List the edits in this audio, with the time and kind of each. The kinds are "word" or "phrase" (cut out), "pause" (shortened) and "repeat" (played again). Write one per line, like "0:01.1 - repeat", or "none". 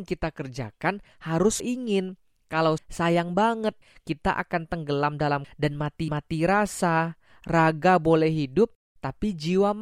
0:01.6 - word
0:02.8 - word
0:05.4 - word
0:06.1 - repeat